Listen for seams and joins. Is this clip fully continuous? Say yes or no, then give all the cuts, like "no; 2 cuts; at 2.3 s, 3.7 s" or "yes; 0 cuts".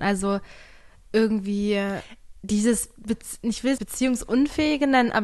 no; 1 cut; at 3.8 s